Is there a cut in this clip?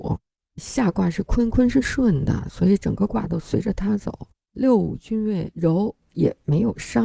yes; 1 cut; at 4.3 s

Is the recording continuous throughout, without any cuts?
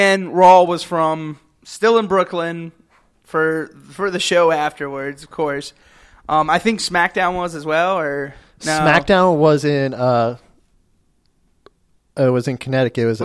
yes; 0 cuts

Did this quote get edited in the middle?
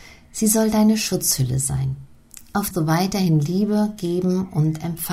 yes; 1 cut; at 2.7 s

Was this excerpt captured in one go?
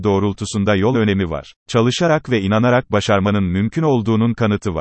no; 2 cuts; at 0.9 s, 1.6 s

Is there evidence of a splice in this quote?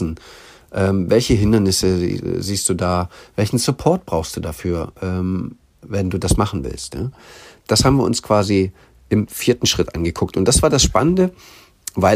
no; 0 cuts

